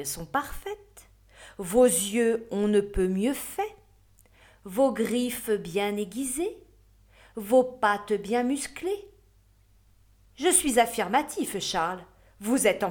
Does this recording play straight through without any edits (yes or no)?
yes